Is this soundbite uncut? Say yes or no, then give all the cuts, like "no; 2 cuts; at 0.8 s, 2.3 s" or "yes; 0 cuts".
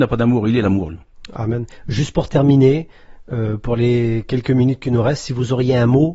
yes; 0 cuts